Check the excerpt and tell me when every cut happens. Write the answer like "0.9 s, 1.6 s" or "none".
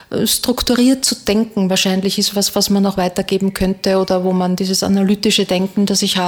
none